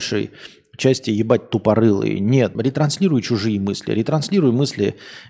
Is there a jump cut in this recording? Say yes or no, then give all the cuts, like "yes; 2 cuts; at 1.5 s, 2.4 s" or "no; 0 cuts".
yes; 1 cut; at 2.5 s